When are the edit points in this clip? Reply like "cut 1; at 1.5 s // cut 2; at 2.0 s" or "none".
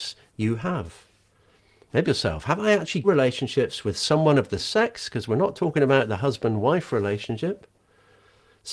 cut 1; at 2.0 s // cut 2; at 3.0 s // cut 3; at 4.6 s